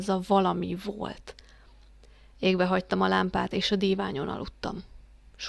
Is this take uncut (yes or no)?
yes